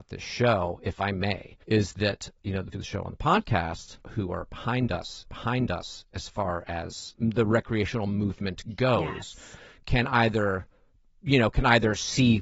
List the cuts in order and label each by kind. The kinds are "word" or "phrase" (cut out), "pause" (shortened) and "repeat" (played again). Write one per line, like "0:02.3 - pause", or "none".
0:01.6 - pause
0:02.4 - word
0:02.7 - phrase
0:04.0 - pause
0:05.2 - repeat
0:07.1 - word